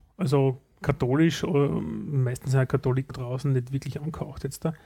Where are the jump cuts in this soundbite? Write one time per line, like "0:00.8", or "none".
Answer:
0:03.1